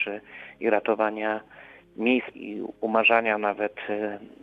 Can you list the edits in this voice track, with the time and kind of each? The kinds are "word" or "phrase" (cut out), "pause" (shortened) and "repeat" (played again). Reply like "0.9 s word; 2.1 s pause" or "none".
2.3 s word